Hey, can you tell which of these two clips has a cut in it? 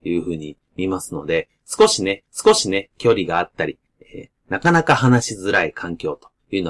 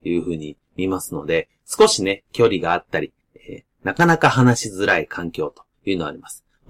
first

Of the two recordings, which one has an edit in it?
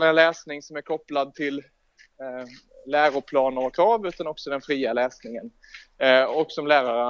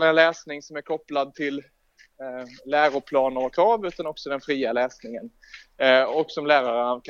second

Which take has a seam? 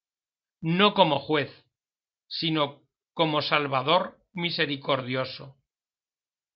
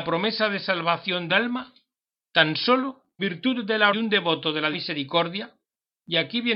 second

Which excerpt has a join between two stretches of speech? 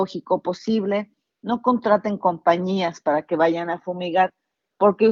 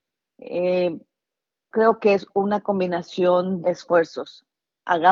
second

